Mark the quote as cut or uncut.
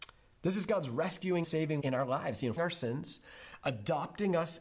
cut